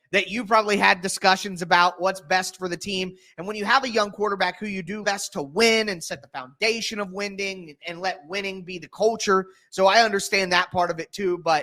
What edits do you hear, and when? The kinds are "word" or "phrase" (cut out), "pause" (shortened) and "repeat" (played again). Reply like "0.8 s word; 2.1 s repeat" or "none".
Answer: 5.0 s phrase; 7.8 s word